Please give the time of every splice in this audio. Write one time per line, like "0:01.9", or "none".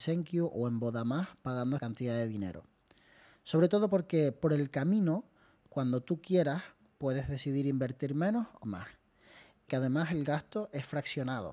0:01.8
0:08.6
0:09.7